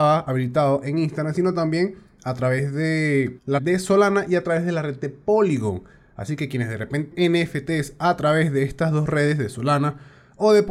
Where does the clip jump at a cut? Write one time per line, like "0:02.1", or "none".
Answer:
0:03.6
0:07.1